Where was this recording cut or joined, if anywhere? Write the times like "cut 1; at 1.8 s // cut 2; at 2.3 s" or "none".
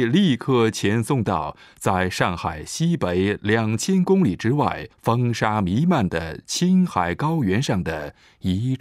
cut 1; at 4.9 s